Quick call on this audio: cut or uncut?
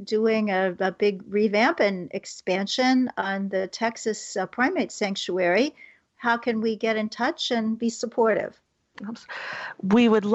uncut